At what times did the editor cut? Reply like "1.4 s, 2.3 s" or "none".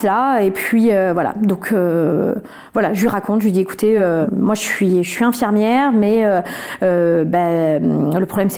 none